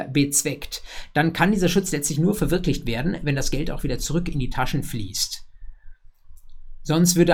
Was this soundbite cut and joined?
no; 0 cuts

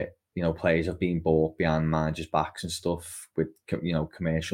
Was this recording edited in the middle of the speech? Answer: no; 0 cuts

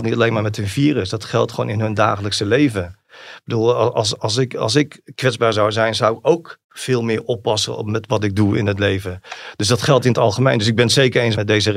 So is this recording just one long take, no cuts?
no; 1 cut; at 6.6 s

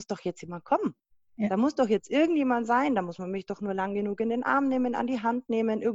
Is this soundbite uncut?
yes; 0 cuts

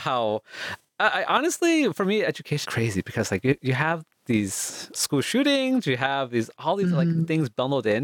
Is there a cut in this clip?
yes; 2 cuts; at 2.7 s, 5.0 s

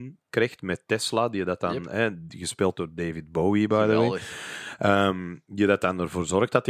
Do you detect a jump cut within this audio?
no; 0 cuts

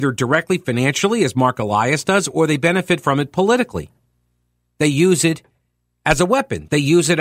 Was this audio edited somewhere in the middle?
no; 0 cuts

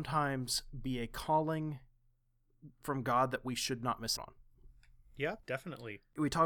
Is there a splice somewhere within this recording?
yes; 2 cuts; at 4.2 s, 5.4 s

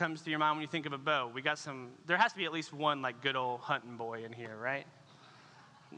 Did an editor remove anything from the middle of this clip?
no; 0 cuts

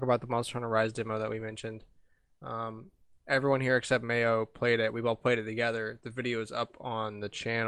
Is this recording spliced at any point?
no; 0 cuts

